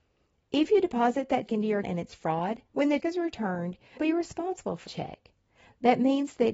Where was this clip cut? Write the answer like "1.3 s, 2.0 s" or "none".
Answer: 1.5 s, 1.8 s, 2.7 s, 3.0 s, 4.0 s, 4.9 s